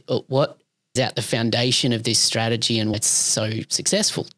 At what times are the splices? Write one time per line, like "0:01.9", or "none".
0:01.0
0:02.9